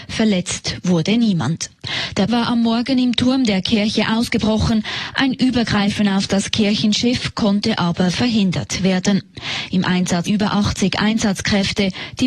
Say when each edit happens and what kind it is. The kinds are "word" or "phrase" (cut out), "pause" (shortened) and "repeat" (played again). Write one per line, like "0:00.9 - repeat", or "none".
0:02.3 - word
0:10.3 - word